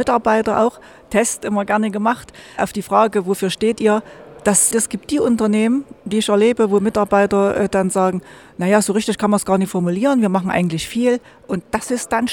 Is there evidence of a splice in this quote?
yes; 2 cuts; at 2.6 s, 4.7 s

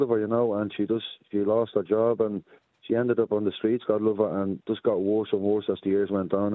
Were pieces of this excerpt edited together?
no; 0 cuts

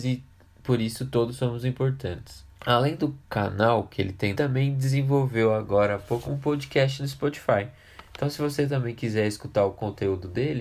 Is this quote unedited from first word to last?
no; 4 cuts; at 2.5 s, 3.2 s, 4.3 s, 6.2 s

